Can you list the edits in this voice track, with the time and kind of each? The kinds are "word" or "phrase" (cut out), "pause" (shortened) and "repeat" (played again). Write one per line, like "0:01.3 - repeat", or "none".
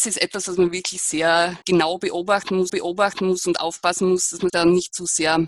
0:01.6 - pause
0:02.7 - repeat
0:04.5 - word